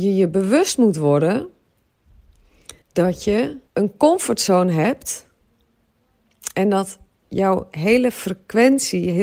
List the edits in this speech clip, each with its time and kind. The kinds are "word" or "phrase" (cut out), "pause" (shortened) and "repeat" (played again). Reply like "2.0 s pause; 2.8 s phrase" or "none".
2.8 s pause; 3.7 s pause